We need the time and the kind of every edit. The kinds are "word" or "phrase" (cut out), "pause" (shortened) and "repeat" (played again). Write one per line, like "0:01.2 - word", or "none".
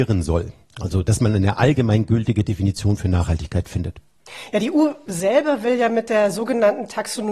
none